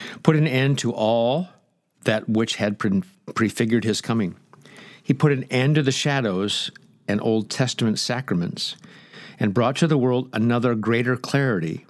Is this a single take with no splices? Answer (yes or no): yes